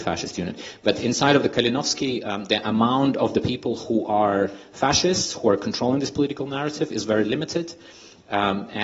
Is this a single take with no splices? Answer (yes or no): yes